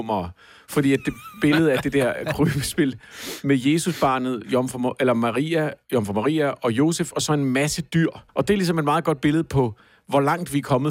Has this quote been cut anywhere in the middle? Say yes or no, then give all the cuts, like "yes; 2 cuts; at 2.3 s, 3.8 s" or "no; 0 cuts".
yes; 1 cut; at 8.3 s